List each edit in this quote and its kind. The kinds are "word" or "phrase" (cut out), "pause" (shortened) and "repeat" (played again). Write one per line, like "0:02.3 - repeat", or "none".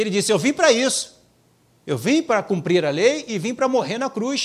0:01.4 - pause